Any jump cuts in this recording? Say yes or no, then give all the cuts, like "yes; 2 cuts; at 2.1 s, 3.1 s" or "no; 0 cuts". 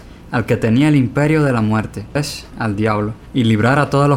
yes; 1 cut; at 2.2 s